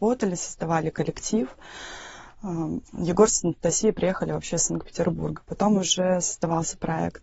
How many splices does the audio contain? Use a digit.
1